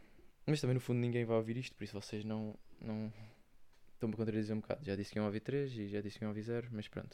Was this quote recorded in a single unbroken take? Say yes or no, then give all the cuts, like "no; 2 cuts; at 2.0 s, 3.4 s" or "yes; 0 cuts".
yes; 0 cuts